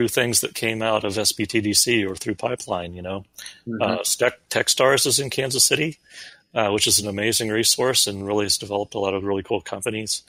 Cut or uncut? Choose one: uncut